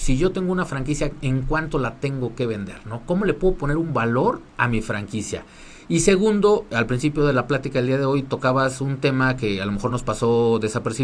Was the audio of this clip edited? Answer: no; 0 cuts

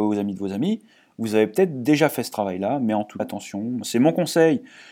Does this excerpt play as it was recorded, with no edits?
no; 1 cut; at 3.2 s

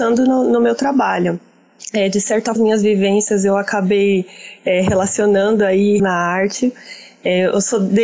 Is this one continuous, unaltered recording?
no; 2 cuts; at 2.6 s, 6.0 s

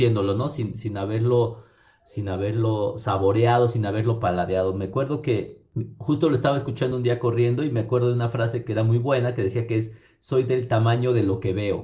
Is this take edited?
no; 0 cuts

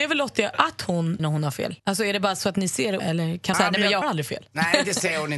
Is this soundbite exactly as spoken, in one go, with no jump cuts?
no; 5 cuts; at 1.2 s, 1.8 s, 3.0 s, 3.5 s, 4.0 s

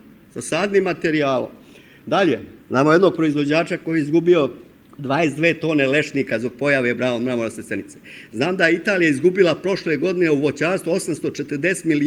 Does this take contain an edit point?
yes; 1 cut; at 2.6 s

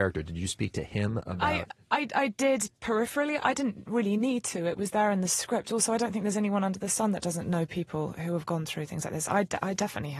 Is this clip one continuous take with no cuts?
no; 1 cut; at 2.8 s

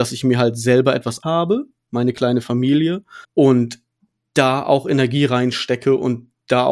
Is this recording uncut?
no; 2 cuts; at 1.2 s, 3.2 s

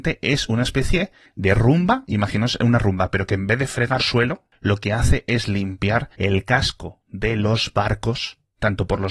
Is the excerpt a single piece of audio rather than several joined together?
no; 2 cuts; at 4.0 s, 6.1 s

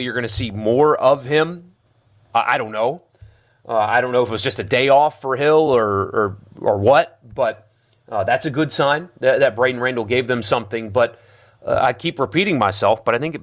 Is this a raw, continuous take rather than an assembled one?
yes; 0 cuts

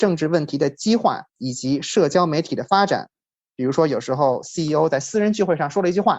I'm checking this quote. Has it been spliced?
yes; 1 cut; at 1.3 s

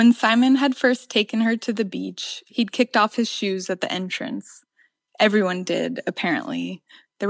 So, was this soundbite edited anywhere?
no; 0 cuts

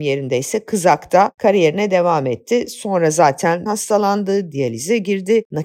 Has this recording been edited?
yes; 1 cut; at 3.7 s

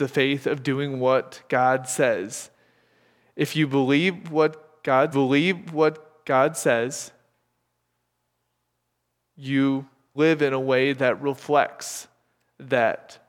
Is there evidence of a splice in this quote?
yes; 2 cuts; at 5.1 s, 10.1 s

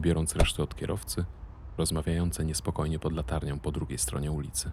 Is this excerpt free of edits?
no; 1 cut; at 1.8 s

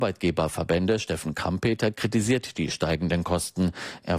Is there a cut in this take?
no; 0 cuts

